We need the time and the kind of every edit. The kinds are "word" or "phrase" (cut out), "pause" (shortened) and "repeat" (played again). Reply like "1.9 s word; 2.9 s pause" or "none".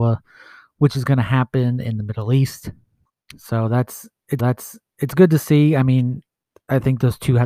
3.0 s pause; 4.4 s repeat